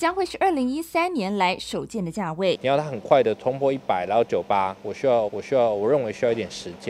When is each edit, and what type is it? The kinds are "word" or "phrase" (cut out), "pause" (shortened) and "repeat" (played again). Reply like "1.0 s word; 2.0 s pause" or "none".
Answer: 5.3 s repeat